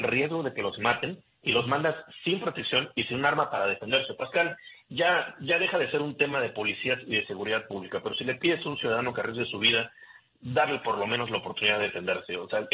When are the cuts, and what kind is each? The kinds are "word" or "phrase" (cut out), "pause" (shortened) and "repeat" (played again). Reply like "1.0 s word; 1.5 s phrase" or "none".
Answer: none